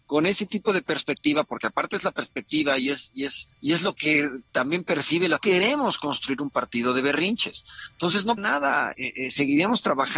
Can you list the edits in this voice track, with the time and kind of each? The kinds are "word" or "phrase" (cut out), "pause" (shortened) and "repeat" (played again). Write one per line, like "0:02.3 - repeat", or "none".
0:03.5 - pause
0:05.4 - phrase
0:08.4 - word
0:08.9 - word